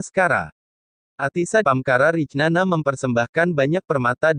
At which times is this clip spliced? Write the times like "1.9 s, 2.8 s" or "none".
1.6 s